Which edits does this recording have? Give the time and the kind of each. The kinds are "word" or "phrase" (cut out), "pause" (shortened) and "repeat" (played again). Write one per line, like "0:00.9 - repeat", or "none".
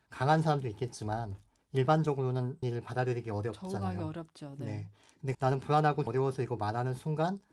0:02.6 - word
0:05.3 - word
0:06.1 - word
0:06.6 - word